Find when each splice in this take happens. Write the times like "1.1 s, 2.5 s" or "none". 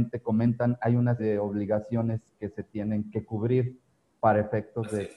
1.2 s